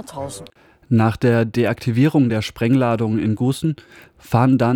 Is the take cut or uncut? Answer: uncut